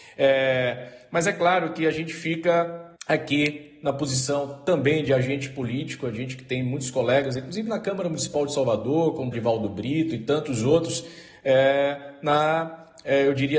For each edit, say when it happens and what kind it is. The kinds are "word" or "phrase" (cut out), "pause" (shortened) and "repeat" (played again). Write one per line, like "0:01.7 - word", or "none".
0:03.0 - pause
0:09.3 - word